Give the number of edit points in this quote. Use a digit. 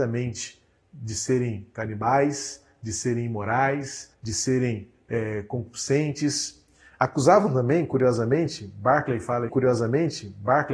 2